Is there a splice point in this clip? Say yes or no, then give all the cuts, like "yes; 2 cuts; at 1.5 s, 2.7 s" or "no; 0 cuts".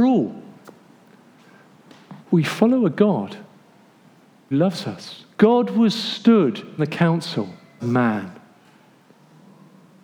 yes; 5 cuts; at 2.2 s, 4.5 s, 5.3 s, 6.8 s, 7.8 s